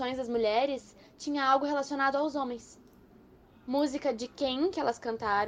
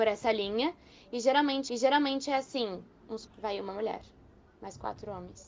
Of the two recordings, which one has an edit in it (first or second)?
second